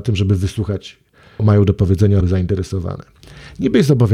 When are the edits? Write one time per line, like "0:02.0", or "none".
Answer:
0:01.4
0:02.2